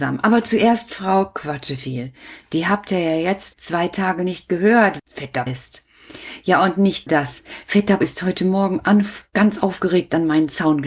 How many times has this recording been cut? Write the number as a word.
five